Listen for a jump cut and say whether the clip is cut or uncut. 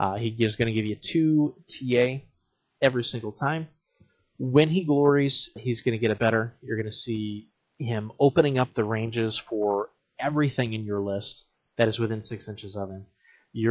cut